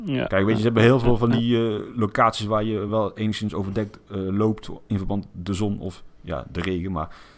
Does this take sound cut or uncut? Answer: uncut